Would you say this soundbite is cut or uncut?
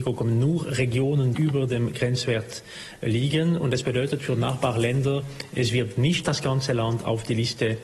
cut